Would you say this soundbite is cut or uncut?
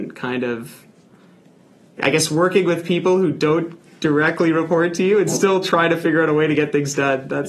uncut